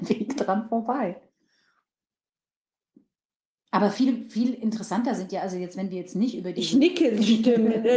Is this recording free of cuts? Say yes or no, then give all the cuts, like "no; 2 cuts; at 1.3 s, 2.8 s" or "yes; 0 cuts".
yes; 0 cuts